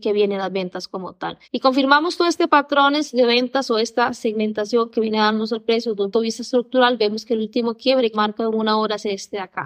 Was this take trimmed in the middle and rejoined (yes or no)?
yes